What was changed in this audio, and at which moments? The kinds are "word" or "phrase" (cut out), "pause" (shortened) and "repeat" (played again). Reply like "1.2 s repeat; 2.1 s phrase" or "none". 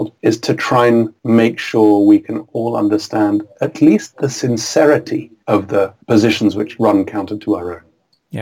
none